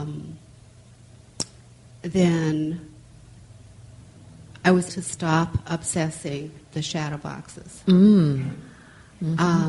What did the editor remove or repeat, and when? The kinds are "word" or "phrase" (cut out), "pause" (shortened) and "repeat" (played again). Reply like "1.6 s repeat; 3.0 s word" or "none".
4.9 s word; 6.6 s word